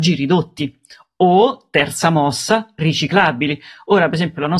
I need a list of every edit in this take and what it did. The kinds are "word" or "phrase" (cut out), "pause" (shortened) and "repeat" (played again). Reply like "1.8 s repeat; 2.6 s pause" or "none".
none